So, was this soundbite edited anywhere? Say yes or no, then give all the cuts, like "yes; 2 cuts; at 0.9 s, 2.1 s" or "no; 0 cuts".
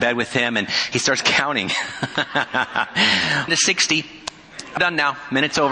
yes; 2 cuts; at 3.5 s, 4.8 s